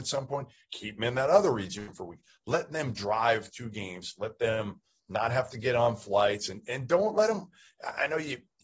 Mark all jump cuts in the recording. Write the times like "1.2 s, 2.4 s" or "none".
none